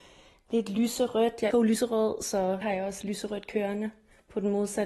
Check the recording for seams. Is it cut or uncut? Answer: cut